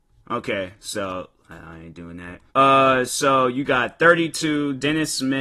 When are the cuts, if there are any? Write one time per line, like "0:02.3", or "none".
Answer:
0:02.5